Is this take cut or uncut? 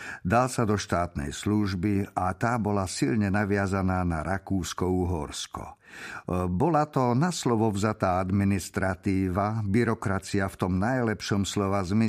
uncut